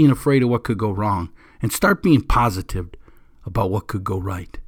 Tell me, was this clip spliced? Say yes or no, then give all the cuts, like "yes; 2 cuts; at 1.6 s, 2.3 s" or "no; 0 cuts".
no; 0 cuts